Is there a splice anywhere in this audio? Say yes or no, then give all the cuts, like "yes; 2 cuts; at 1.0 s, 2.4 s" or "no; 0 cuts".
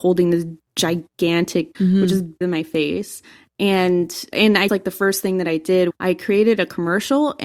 yes; 5 cuts; at 1.7 s, 2.4 s, 4.3 s, 4.7 s, 5.9 s